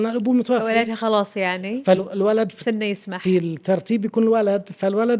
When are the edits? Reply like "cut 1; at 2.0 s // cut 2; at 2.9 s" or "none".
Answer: none